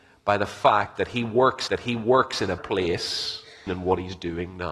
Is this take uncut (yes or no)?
no